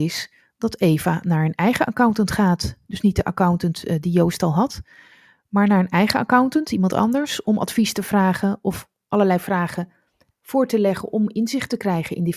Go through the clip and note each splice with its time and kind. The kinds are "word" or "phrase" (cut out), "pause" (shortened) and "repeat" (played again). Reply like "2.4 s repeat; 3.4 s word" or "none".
none

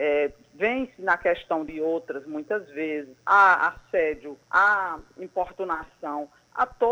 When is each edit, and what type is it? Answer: 1.7 s phrase; 4.4 s pause

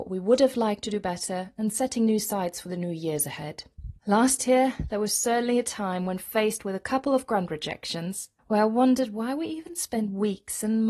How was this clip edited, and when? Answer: 4.0 s pause; 8.4 s pause

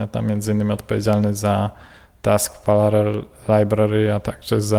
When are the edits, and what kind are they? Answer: none

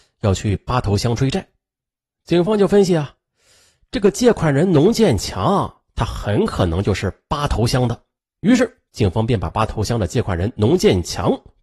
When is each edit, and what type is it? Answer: 8.2 s pause; 8.9 s pause

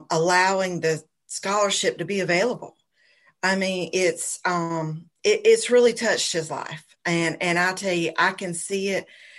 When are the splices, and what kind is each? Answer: none

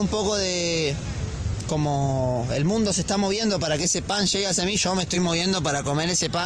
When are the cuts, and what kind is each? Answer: none

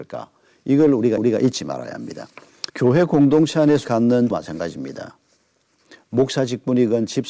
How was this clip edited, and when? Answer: 1.2 s repeat; 2.7 s pause; 3.8 s word; 4.3 s word

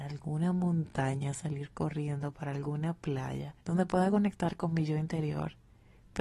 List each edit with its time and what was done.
3.6 s pause

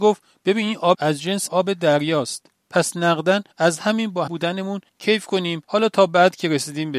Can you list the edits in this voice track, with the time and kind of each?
0.9 s word; 1.5 s word; 2.6 s pause; 3.5 s pause; 4.3 s word; 4.9 s pause; 5.6 s pause

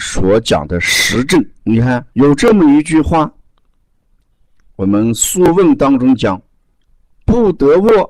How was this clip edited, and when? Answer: 1.6 s pause; 2.1 s pause; 6.5 s pause

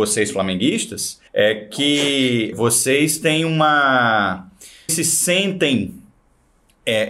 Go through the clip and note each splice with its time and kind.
1.3 s pause; 2.5 s word; 4.9 s word

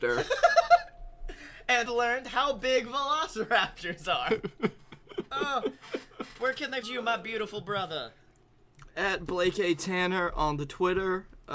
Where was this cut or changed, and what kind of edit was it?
1.9 s word; 6.8 s word

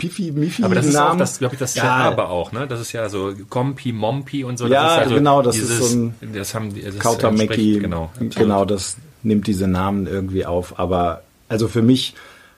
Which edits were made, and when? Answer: 1.7 s phrase

